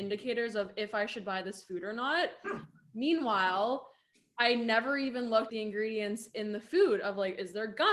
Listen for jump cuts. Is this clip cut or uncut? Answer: cut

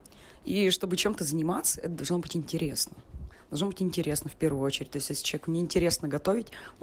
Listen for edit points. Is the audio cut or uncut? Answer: uncut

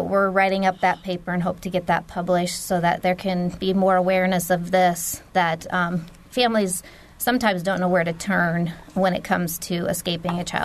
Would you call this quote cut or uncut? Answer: uncut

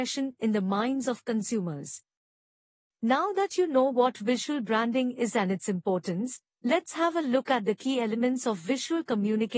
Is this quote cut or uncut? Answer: uncut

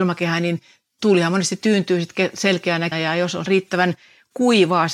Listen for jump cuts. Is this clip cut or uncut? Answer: cut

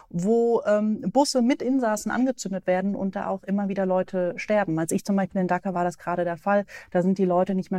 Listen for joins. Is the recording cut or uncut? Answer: cut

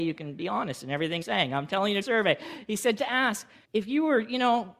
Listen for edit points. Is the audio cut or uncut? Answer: cut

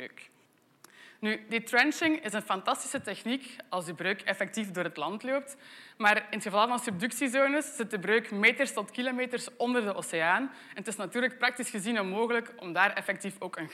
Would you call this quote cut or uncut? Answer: uncut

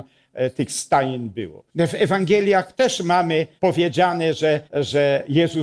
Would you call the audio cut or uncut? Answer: cut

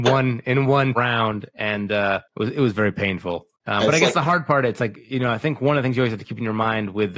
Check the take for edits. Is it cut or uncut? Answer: cut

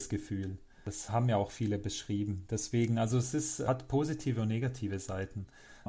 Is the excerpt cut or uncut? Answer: uncut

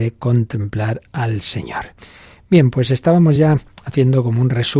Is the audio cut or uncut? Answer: uncut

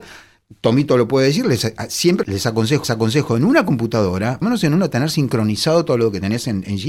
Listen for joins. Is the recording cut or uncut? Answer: cut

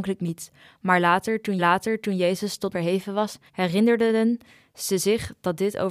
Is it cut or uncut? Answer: cut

